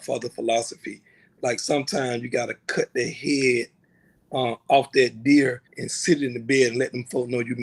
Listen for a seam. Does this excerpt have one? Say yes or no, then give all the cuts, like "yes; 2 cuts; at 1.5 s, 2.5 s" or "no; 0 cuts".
yes; 1 cut; at 5.7 s